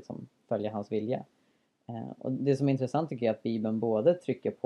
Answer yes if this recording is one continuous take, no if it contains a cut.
yes